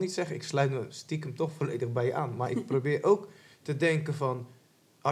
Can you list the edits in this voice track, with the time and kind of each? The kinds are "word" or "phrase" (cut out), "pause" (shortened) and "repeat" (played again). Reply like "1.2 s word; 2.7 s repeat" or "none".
none